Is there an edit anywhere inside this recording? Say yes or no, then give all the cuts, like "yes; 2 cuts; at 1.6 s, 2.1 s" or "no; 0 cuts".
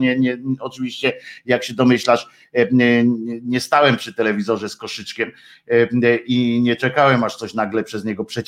no; 0 cuts